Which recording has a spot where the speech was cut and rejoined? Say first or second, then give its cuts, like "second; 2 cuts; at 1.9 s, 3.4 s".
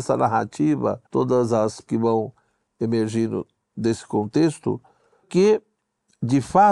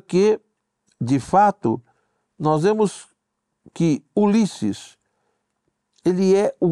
first; 3 cuts; at 1.1 s, 1.8 s, 5.2 s